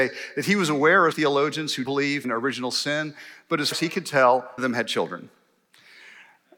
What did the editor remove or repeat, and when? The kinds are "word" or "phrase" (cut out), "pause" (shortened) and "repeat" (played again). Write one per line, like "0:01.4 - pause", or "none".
0:01.1 - word
0:01.9 - word
0:02.2 - word
0:03.7 - word
0:04.6 - word